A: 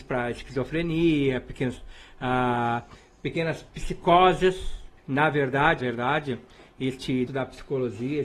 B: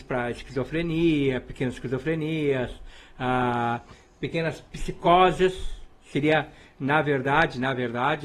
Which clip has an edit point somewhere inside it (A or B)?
A